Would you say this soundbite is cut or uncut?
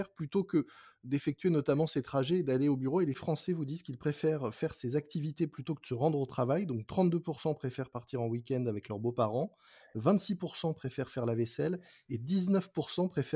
uncut